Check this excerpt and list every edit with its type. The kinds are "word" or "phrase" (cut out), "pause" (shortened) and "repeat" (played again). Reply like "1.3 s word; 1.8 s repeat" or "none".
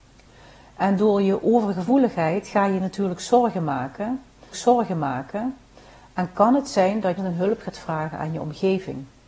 4.5 s repeat; 7.2 s phrase